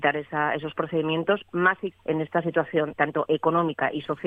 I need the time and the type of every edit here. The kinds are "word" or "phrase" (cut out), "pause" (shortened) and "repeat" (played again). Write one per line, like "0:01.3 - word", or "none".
0:01.9 - word
0:03.0 - word